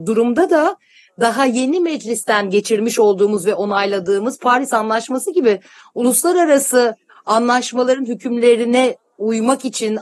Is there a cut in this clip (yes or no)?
no